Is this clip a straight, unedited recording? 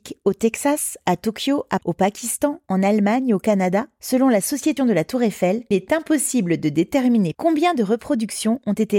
no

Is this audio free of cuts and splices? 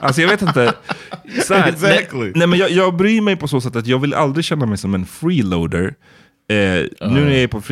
yes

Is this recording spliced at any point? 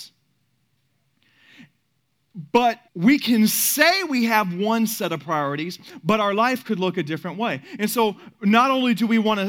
yes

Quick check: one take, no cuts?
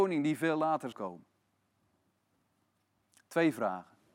no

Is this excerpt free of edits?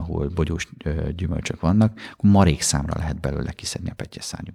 yes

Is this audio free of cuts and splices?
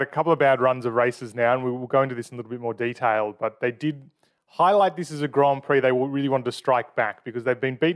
yes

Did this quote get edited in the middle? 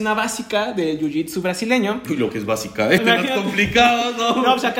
yes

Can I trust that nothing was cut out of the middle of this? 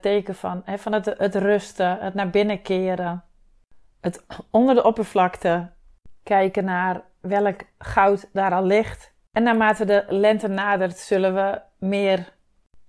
yes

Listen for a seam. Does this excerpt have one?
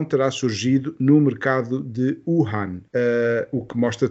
yes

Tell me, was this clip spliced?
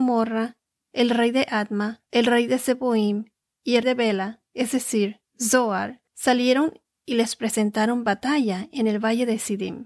yes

